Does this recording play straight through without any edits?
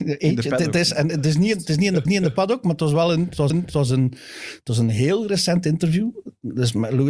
no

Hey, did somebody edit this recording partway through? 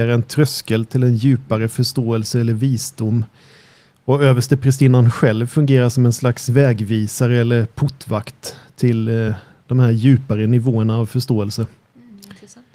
no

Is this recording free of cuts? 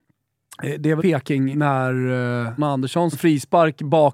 no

